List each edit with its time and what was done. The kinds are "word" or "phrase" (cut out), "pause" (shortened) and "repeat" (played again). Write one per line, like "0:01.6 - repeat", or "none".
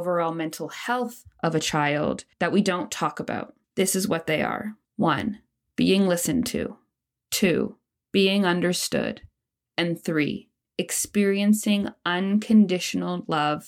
0:02.3 - pause
0:03.6 - pause
0:04.8 - pause

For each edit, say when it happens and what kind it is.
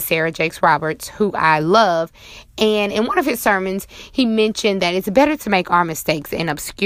none

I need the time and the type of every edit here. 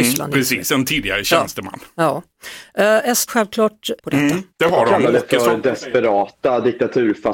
0:03.3 - word
0:04.0 - word
0:04.5 - pause

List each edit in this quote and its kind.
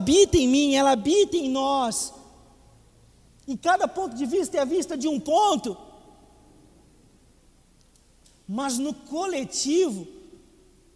none

